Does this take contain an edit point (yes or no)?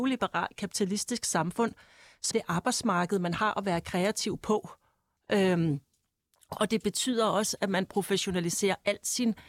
yes